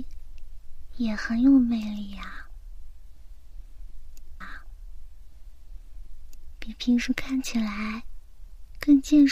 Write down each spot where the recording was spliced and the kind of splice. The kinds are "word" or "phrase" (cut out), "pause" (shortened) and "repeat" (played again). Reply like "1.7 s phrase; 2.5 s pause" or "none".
4.4 s repeat